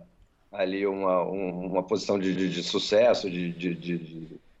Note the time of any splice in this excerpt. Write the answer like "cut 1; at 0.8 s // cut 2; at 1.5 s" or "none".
cut 1; at 2.4 s